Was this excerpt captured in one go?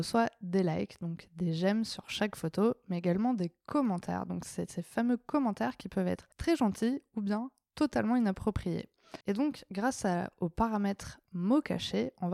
no; 2 cuts; at 6.3 s, 9.2 s

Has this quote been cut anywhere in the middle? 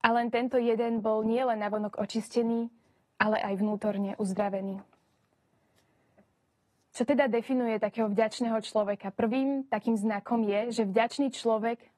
no; 0 cuts

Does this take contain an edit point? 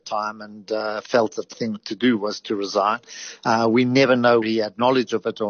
yes; 2 cuts; at 1.5 s, 4.4 s

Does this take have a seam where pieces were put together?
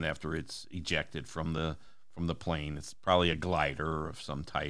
no; 0 cuts

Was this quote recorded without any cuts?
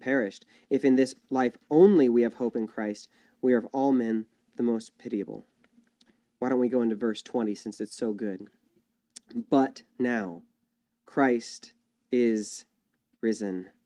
yes; 0 cuts

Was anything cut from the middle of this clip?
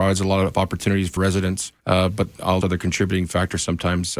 yes; 3 cuts; at 1.2 s, 1.8 s, 2.6 s

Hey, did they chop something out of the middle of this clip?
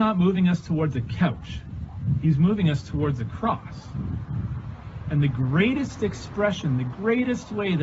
no; 0 cuts

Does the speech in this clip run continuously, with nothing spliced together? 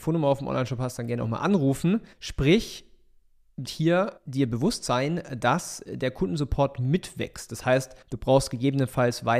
no; 4 cuts; at 2.1 s, 3.6 s, 4.2 s, 8.0 s

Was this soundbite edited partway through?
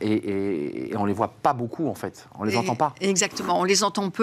no; 0 cuts

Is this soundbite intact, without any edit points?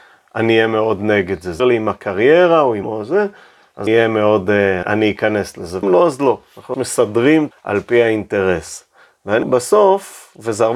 no; 8 cuts; at 1.6 s, 2.8 s, 3.9 s, 4.8 s, 5.8 s, 6.7 s, 7.5 s, 9.4 s

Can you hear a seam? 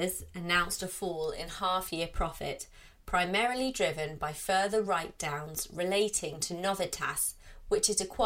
no; 0 cuts

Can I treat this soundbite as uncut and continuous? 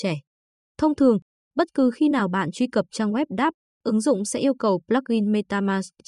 yes; 0 cuts

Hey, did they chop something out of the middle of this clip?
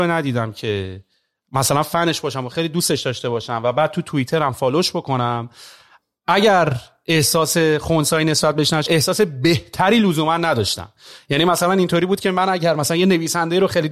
yes; 1 cut; at 8.9 s

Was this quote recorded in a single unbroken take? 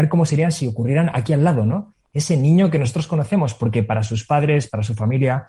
yes; 0 cuts

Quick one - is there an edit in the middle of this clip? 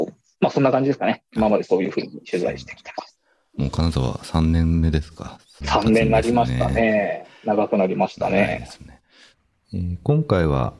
yes; 1 cut; at 5.6 s

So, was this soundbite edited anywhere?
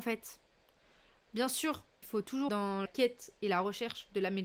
yes; 3 cuts; at 2.0 s, 2.5 s, 2.9 s

